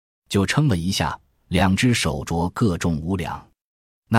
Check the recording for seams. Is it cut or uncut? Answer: uncut